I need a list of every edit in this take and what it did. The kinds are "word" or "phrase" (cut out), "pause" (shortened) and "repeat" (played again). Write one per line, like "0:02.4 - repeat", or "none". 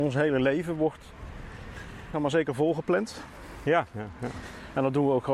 0:02.1 - word